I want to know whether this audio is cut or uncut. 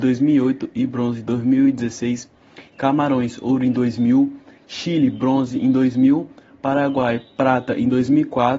uncut